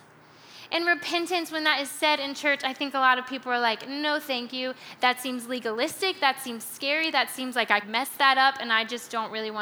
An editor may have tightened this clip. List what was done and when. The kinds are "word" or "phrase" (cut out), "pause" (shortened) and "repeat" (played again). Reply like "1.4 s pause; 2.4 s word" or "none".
7.8 s word